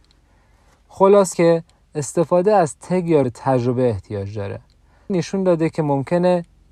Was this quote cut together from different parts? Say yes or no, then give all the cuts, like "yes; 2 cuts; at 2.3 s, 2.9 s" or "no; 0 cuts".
yes; 3 cuts; at 1.3 s, 3.2 s, 5.1 s